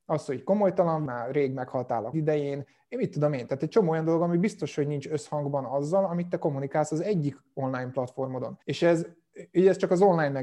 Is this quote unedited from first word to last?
no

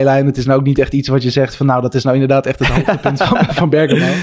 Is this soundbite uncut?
yes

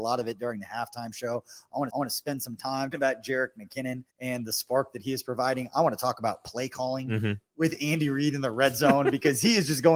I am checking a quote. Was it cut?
yes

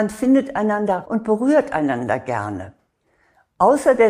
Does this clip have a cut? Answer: yes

